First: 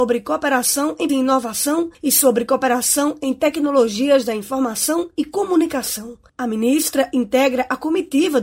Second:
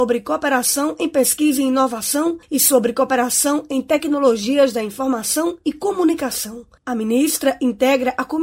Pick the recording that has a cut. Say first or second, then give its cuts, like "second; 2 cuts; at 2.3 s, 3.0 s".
first; 1 cut; at 1.1 s